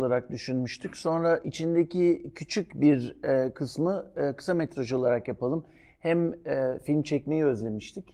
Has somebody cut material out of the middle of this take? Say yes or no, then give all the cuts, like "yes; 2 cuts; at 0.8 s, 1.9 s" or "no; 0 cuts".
no; 0 cuts